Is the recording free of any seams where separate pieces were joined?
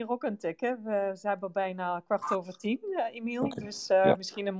yes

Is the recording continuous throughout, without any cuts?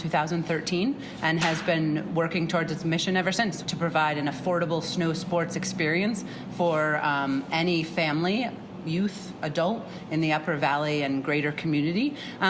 no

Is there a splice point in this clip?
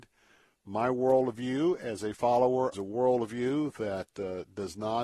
yes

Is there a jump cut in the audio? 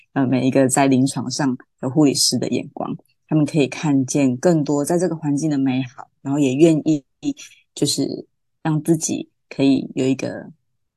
no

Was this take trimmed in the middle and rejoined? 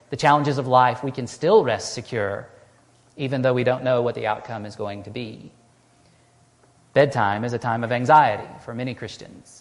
no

